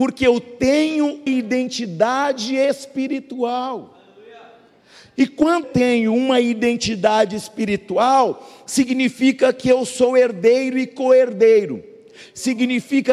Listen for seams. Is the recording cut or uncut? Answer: cut